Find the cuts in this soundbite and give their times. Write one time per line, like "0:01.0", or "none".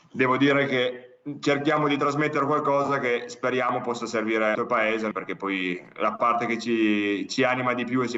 0:04.5
0:05.1